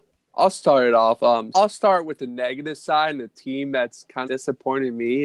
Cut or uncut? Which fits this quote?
cut